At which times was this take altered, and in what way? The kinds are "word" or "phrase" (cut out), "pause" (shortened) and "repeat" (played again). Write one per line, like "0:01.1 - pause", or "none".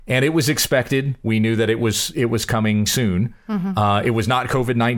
0:02.9 - word